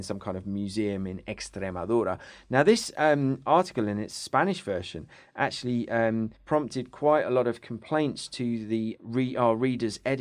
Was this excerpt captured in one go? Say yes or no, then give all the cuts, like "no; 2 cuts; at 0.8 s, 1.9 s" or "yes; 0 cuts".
no; 1 cut; at 6.4 s